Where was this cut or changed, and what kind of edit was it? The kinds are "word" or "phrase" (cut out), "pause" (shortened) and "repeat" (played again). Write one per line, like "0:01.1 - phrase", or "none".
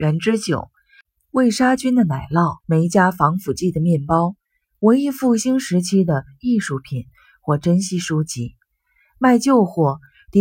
0:02.6 - pause